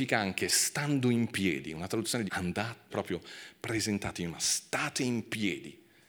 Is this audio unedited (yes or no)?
no